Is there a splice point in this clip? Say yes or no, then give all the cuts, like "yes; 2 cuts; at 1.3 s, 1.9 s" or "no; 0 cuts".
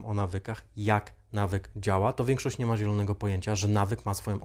no; 0 cuts